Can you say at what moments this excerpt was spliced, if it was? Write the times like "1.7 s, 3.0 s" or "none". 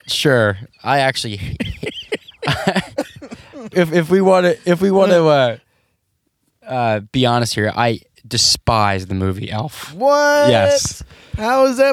3.7 s